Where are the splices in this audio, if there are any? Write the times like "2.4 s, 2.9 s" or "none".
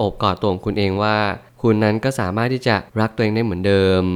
2.9 s